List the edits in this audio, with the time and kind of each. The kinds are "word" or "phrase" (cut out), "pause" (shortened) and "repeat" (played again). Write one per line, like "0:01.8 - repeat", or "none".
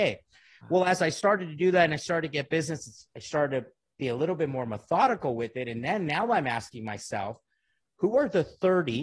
none